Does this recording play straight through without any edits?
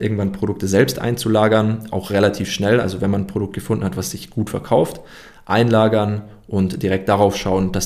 yes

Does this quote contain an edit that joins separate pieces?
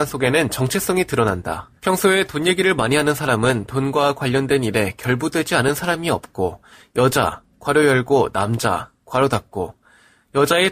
yes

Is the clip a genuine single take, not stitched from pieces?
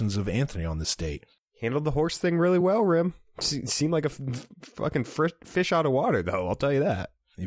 yes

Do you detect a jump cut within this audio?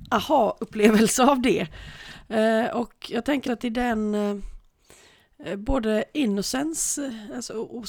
yes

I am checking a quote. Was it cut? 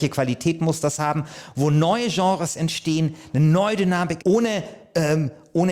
yes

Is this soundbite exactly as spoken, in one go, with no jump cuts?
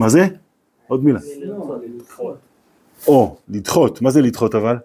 yes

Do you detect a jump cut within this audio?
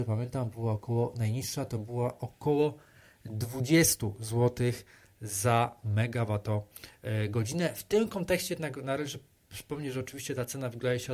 no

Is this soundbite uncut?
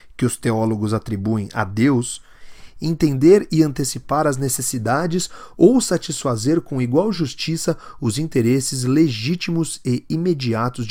yes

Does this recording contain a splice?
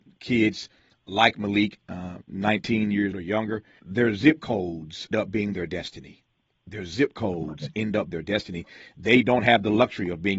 yes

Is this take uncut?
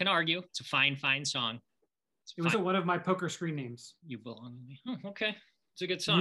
no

